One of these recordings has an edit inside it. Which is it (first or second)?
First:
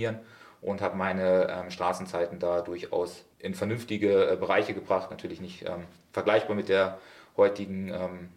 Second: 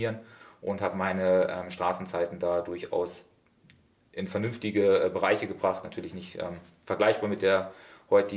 first